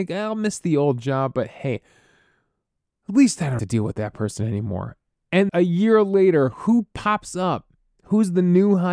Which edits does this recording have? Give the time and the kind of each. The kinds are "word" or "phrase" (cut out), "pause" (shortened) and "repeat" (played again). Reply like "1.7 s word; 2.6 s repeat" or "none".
3.6 s word; 5.5 s word